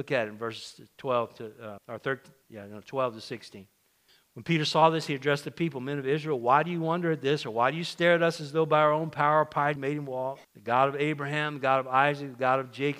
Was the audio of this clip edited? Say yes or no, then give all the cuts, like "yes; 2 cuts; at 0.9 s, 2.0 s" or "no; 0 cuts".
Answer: yes; 5 cuts; at 1.8 s, 2.4 s, 4.1 s, 9.8 s, 10.4 s